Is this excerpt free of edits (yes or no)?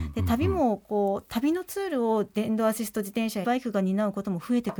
no